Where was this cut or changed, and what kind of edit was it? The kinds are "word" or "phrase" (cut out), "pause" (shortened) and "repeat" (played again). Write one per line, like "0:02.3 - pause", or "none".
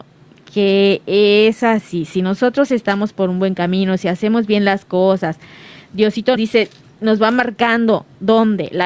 0:06.4 - word